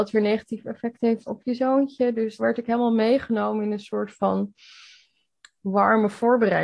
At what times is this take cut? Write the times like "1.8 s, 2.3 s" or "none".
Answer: 1.3 s, 2.4 s